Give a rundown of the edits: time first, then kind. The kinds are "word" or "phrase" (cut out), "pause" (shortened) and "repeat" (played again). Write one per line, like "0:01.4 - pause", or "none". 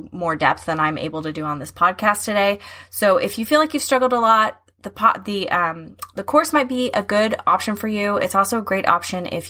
none